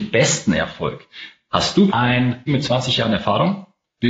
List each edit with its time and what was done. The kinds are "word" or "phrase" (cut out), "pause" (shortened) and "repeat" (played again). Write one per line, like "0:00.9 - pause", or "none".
0:01.9 - word
0:02.5 - word